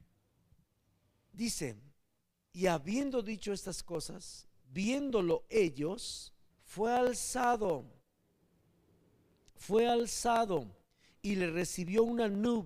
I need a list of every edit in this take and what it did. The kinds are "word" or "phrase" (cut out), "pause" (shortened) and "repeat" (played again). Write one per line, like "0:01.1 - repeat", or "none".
0:06.5 - pause

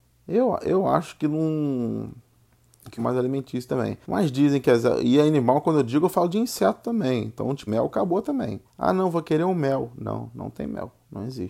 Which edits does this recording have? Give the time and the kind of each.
0:03.0 - phrase
0:04.0 - pause
0:07.7 - word
0:08.7 - pause

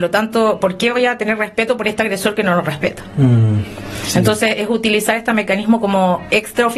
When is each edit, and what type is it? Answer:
none

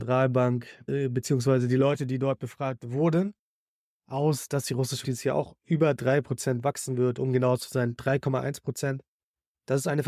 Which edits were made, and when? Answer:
0:05.0 - word

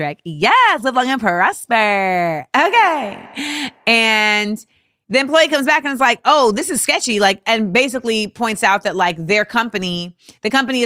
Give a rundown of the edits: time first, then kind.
none

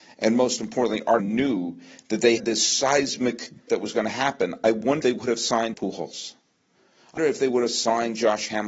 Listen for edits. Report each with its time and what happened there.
0:01.2 - word
0:02.4 - word
0:03.7 - word
0:05.0 - word
0:05.7 - word
0:07.2 - word

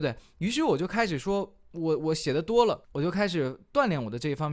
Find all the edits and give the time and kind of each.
0:02.8 - pause

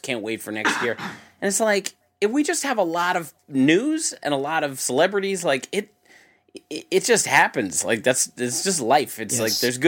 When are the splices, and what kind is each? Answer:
0:02.0 - pause

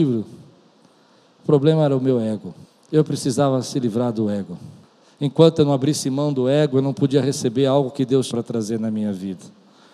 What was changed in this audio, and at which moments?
0:02.6 - pause
0:04.8 - pause
0:08.3 - word

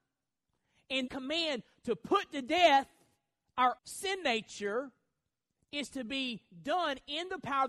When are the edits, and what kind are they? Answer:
0:01.1 - word
0:03.8 - word

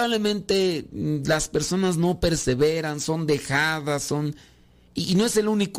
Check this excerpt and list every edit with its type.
none

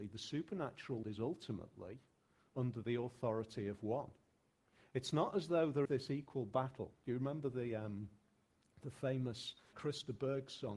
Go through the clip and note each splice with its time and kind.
0:01.0 - word
0:05.8 - word
0:09.7 - word

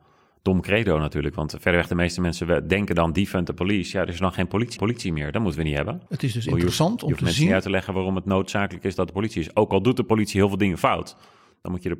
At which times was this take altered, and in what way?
0:04.8 - repeat
0:06.1 - pause

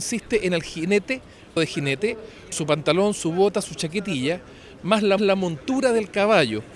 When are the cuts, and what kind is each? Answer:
0:01.6 - word
0:02.5 - word
0:05.2 - repeat

